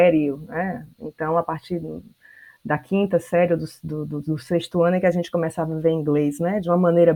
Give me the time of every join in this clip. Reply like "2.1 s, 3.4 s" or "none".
0.9 s